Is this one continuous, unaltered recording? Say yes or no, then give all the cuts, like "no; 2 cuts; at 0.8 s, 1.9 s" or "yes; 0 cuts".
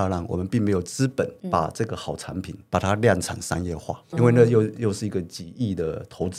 no; 3 cuts; at 1.4 s, 2.7 s, 4.1 s